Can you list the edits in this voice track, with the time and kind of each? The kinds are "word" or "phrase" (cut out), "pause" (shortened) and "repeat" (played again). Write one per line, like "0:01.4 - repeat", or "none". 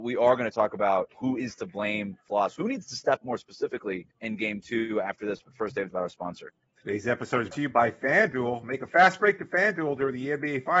0:01.1 - word
0:02.3 - word
0:03.2 - word
0:04.1 - pause
0:05.9 - phrase
0:06.6 - pause
0:07.5 - word